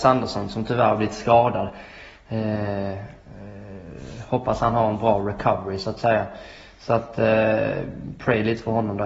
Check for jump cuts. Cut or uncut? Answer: uncut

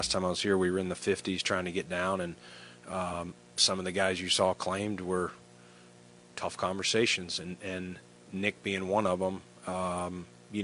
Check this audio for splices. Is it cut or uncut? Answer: uncut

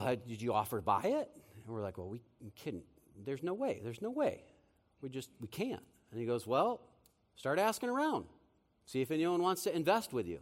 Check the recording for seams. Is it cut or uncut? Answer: uncut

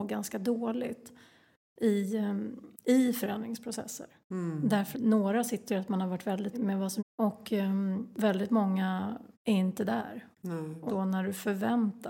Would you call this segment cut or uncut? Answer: cut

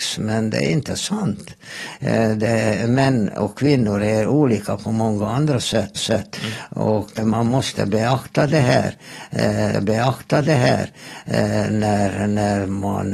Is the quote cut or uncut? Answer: cut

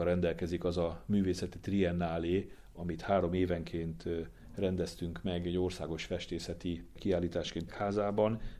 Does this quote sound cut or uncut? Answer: cut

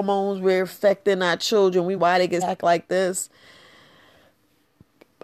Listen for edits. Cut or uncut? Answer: cut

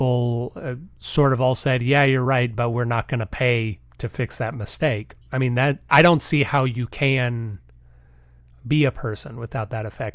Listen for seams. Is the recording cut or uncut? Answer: cut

